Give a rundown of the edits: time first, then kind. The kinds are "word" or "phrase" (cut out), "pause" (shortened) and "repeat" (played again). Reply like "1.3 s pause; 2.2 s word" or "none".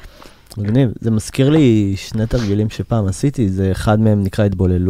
none